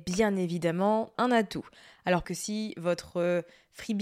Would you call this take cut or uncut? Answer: cut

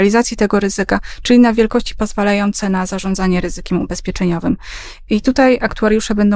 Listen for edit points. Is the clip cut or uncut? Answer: uncut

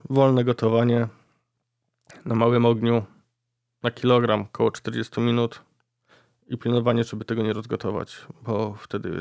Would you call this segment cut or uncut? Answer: uncut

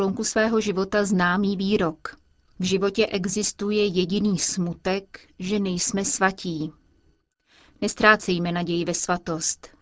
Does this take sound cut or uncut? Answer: uncut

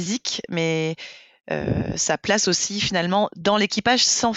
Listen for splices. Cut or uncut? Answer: uncut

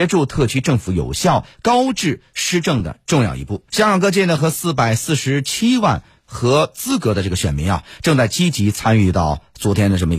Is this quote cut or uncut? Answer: cut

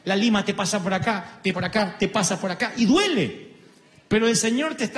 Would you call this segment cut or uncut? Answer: cut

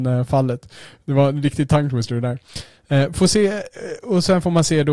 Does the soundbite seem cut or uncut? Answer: uncut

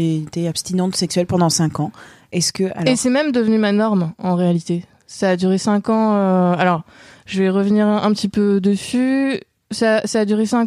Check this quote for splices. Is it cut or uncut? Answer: uncut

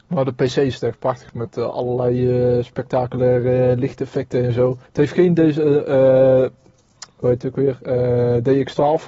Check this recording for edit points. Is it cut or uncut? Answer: cut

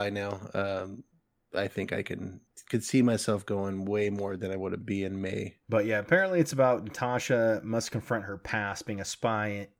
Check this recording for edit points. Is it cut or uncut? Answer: uncut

